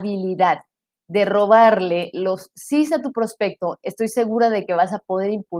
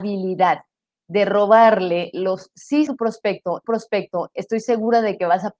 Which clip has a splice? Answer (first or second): second